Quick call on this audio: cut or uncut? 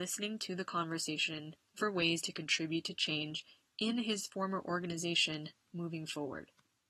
cut